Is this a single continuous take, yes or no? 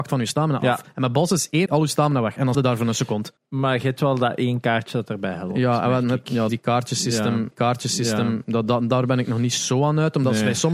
no